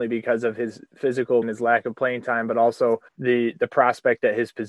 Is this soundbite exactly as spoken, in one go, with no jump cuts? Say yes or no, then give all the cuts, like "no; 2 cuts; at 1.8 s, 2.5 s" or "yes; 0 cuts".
no; 2 cuts; at 1.4 s, 3.1 s